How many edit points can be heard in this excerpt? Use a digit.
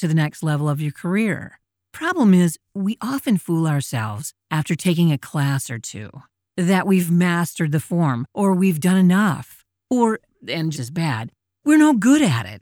1